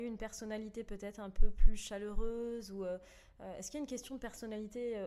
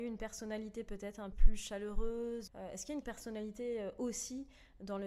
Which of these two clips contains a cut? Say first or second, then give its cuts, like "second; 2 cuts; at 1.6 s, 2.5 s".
second; 3 cuts; at 1.3 s, 2.5 s, 3.0 s